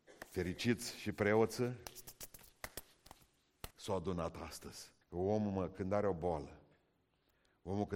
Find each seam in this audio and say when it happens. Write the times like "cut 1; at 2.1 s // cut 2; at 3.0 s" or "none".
cut 1; at 3.7 s // cut 2; at 5.0 s